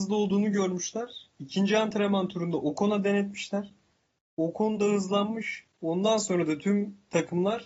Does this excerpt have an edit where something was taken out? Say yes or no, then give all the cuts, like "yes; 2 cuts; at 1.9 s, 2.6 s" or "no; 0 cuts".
no; 0 cuts